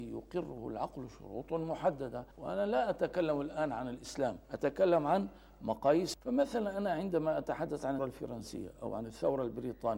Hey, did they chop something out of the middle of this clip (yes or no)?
yes